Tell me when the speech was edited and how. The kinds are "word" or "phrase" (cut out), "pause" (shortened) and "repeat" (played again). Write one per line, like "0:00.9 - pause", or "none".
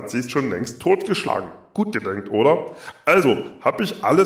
none